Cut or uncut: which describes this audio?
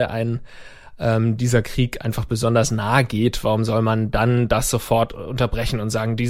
uncut